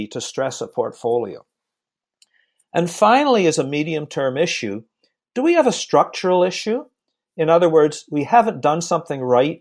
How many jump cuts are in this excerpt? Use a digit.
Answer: 0